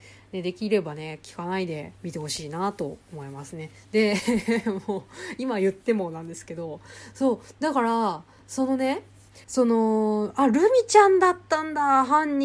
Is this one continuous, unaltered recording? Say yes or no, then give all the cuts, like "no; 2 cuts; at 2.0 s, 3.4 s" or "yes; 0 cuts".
no; 2 cuts; at 2.0 s, 9.4 s